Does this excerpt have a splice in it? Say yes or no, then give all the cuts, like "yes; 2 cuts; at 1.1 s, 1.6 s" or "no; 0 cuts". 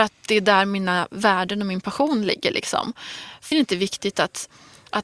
yes; 1 cut; at 3.5 s